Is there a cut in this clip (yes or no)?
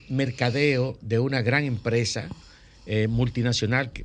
no